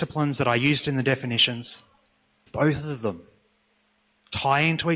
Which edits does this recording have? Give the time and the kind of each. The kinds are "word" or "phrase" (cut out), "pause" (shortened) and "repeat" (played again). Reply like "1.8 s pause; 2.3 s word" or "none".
2.5 s word